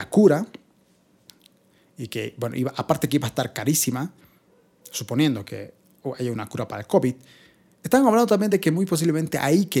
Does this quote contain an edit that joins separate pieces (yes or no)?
no